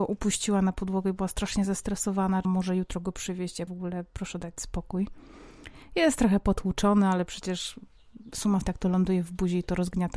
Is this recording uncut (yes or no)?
no